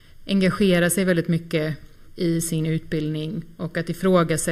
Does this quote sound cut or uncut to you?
cut